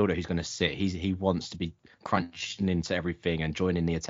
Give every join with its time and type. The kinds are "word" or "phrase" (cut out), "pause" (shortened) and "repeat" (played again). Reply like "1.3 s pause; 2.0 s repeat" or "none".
none